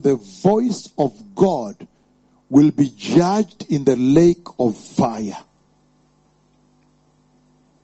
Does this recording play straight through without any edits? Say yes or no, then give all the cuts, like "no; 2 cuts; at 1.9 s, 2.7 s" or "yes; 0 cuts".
yes; 0 cuts